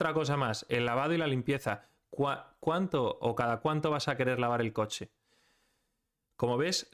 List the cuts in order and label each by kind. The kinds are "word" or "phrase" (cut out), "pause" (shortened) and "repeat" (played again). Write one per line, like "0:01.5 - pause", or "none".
none